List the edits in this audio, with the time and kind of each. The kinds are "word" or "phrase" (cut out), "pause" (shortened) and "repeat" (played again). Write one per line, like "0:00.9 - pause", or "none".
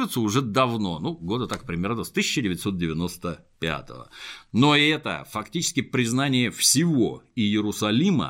none